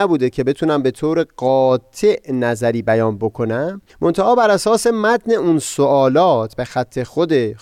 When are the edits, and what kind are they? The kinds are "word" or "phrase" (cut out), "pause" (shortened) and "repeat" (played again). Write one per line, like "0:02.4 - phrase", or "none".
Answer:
0:03.9 - pause